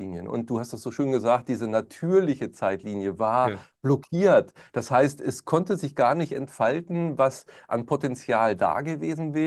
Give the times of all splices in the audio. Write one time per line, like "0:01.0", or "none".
none